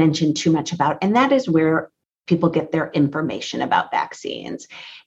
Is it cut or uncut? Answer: uncut